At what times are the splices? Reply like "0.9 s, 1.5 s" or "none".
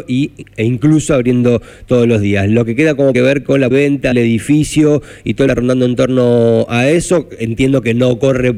3.1 s, 3.7 s, 4.1 s, 5.5 s